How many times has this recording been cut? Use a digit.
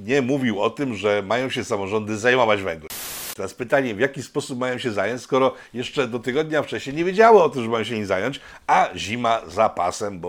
0